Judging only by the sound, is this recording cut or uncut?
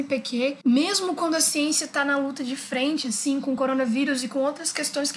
uncut